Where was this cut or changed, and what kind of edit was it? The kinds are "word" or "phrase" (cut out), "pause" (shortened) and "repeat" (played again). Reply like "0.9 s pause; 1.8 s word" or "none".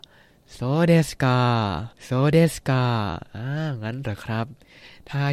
1.9 s pause